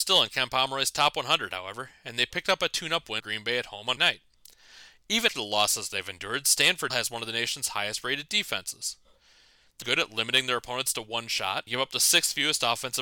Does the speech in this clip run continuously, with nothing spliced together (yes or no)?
no